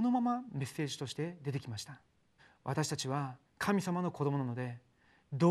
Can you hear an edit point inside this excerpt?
yes; 2 cuts; at 2.4 s, 3.5 s

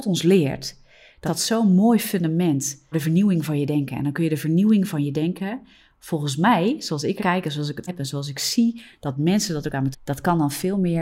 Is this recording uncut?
no; 5 cuts; at 1.3 s, 2.9 s, 7.2 s, 7.9 s, 9.9 s

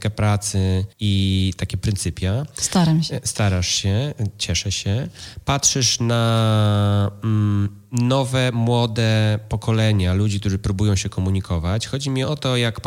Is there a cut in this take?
yes; 1 cut; at 0.9 s

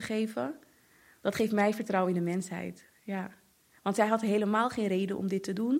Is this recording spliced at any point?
no; 0 cuts

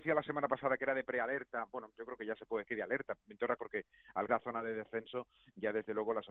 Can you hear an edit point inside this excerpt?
yes; 3 cuts; at 2.6 s, 3.6 s, 4.3 s

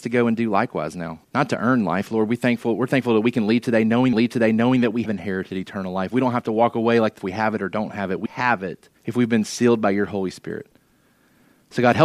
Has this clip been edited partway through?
yes; 6 cuts; at 1.2 s, 4.1 s, 5.1 s, 7.2 s, 8.3 s, 9.0 s

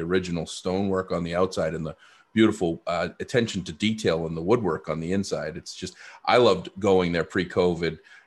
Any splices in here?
no; 0 cuts

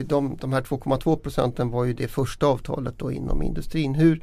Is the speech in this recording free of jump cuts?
yes; 0 cuts

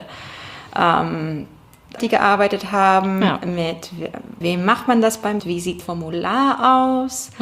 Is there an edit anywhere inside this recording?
yes; 4 cuts; at 2.0 s, 4.4 s, 5.4 s, 5.8 s

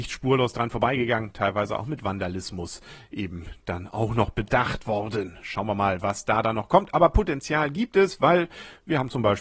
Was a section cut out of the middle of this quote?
no; 0 cuts

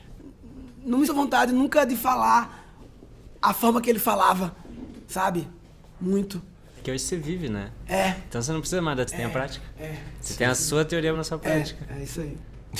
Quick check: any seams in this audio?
yes; 3 cuts; at 1.1 s, 9.1 s, 11.1 s

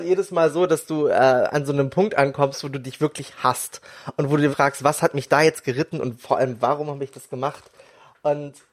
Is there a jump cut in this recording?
yes; 1 cut; at 4.5 s

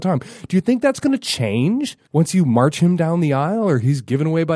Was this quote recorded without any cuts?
no; 1 cut; at 2.1 s

